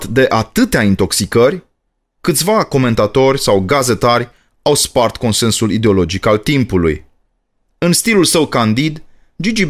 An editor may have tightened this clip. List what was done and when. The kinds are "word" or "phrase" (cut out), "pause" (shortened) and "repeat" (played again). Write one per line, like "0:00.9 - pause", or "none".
none